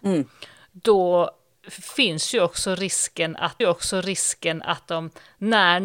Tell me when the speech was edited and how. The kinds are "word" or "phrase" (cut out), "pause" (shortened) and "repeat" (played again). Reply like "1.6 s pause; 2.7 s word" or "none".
1.5 s word; 3.6 s repeat